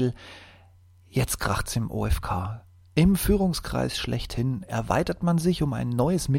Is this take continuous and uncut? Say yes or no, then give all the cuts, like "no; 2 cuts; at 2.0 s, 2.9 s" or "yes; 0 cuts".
yes; 0 cuts